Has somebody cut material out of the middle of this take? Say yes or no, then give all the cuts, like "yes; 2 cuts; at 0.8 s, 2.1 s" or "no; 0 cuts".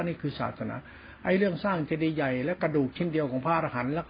no; 0 cuts